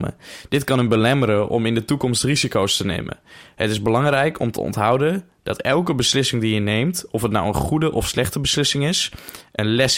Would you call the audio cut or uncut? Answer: uncut